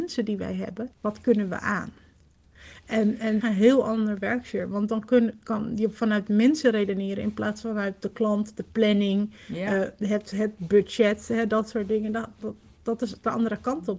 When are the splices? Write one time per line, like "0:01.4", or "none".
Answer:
0:00.9
0:03.4